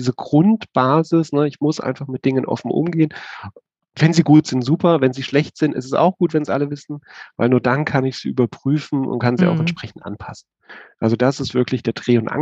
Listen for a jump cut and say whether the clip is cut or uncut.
uncut